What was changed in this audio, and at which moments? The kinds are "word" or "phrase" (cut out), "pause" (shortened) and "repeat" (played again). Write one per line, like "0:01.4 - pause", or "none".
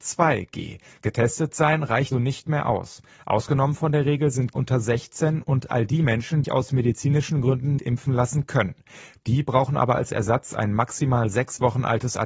0:02.1 - word
0:04.5 - word
0:06.4 - word
0:07.8 - word

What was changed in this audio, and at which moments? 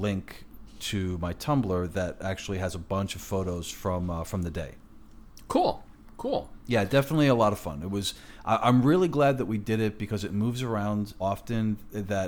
0:11.2 - word

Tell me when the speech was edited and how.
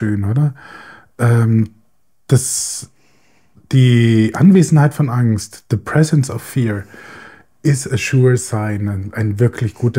none

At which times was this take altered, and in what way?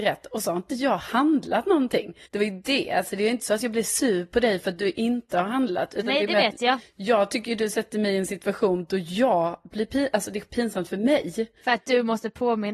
0:02.3 - pause
0:11.6 - pause

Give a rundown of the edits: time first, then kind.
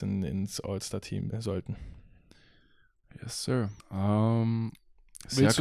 0:01.3 - word
0:03.8 - pause

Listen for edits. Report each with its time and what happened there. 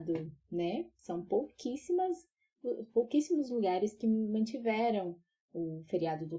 none

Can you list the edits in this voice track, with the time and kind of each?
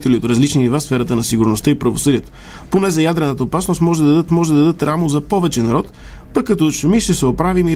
0:04.3 - repeat

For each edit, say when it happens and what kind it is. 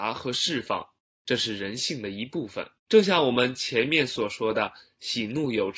0:01.0 - pause
0:02.8 - pause

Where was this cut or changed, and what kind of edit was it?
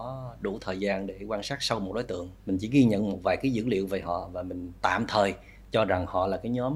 0:02.4 - pause

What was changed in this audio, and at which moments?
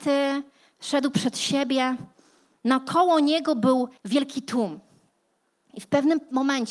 0:04.0 - pause

